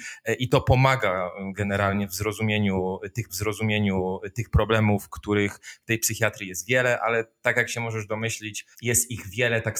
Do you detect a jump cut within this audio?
yes; 2 cuts; at 3.3 s, 8.7 s

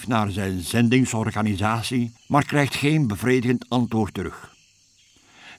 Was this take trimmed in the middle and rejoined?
yes; 1 cut; at 2.2 s

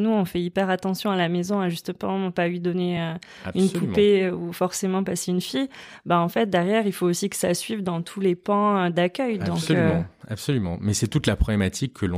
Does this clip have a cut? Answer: no; 0 cuts

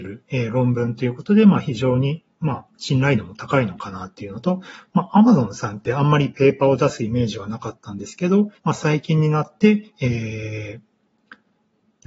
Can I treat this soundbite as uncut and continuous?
no; 2 cuts; at 2.7 s, 8.6 s

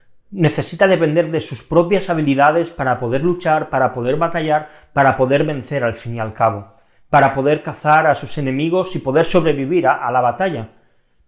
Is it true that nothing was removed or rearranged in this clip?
yes; 0 cuts

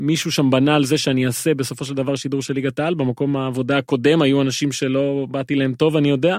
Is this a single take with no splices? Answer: yes; 0 cuts

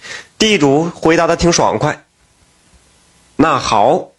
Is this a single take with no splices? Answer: yes; 0 cuts

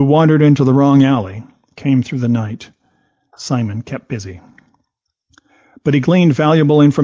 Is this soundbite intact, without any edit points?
yes; 0 cuts

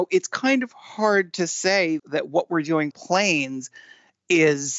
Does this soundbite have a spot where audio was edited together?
yes; 2 cuts; at 2.0 s, 2.9 s

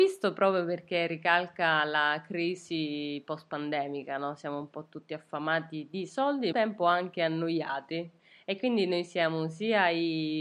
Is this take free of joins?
no; 1 cut; at 6.5 s

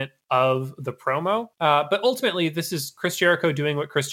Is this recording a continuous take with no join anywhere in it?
no; 1 cut; at 1.5 s

